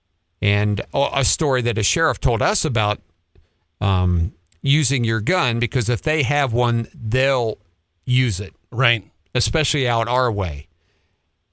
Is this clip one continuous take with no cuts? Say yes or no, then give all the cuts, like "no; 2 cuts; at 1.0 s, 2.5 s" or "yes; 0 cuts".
yes; 0 cuts